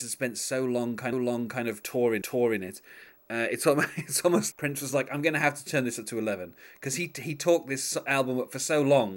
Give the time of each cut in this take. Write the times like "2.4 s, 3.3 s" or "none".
1.1 s, 2.2 s, 4.5 s